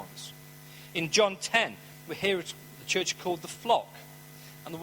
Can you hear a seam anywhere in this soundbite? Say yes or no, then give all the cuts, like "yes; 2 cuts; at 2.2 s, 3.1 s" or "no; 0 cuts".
no; 0 cuts